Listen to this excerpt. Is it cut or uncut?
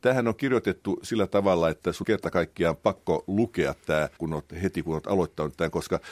cut